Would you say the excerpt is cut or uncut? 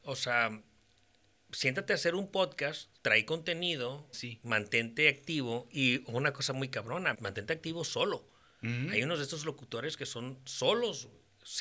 cut